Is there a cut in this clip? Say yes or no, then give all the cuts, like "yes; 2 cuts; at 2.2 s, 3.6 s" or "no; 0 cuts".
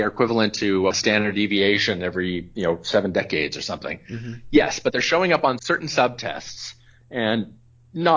yes; 2 cuts; at 0.9 s, 5.6 s